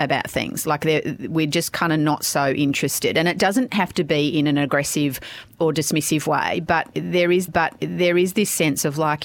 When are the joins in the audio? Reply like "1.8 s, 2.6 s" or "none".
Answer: 7.5 s

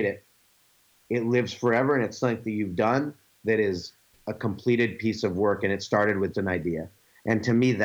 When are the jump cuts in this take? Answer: 6.3 s

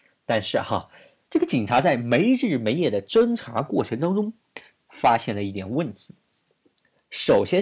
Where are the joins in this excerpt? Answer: none

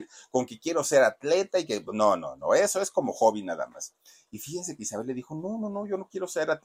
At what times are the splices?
none

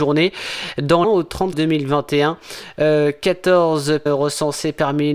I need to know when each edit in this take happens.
1.0 s, 1.5 s, 4.1 s

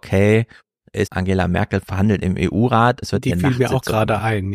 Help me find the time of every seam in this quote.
1.1 s, 1.8 s, 3.0 s

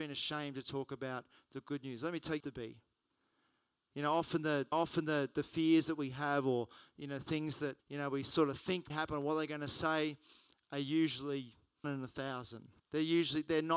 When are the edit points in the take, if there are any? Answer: 2.4 s, 4.7 s, 7.8 s, 8.9 s, 11.8 s, 12.8 s

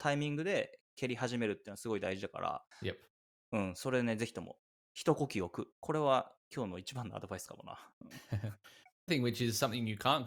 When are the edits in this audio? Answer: 2.7 s, 6.4 s, 9.1 s

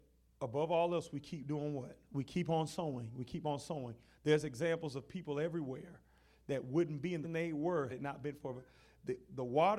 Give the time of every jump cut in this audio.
2.0 s, 7.2 s, 7.9 s

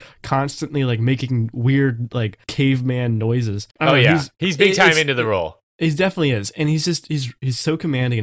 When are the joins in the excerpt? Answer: 2.4 s, 3.7 s, 4.3 s

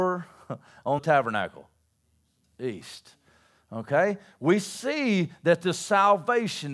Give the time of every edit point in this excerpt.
1.0 s

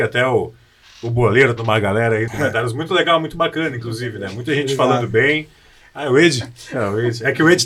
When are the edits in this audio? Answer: 1.6 s, 2.3 s

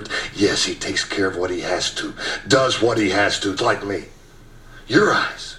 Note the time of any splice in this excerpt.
3.6 s

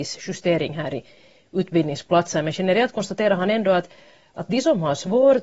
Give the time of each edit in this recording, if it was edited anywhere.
none

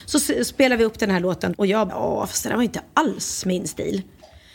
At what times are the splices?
1.5 s, 1.9 s

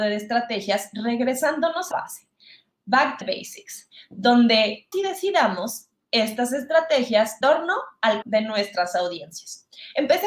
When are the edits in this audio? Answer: 1.9 s, 3.2 s, 4.9 s, 7.4 s, 8.2 s

